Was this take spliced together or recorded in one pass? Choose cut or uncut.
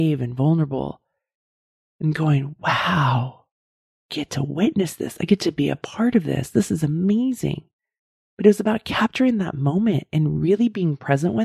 uncut